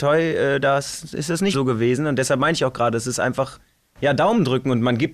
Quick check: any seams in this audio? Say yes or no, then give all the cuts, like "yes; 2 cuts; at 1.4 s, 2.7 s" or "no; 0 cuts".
yes; 1 cut; at 1.5 s